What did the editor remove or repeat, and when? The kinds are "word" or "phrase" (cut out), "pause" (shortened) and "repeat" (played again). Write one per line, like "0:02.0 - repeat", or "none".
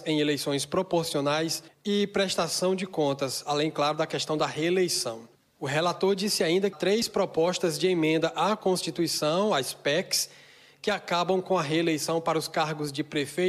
0:06.7 - word